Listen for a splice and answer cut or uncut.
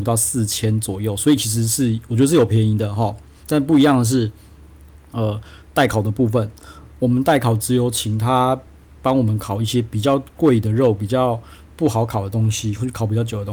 uncut